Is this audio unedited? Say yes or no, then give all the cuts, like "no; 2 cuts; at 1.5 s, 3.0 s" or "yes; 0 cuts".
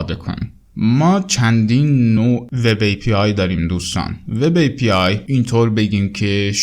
yes; 0 cuts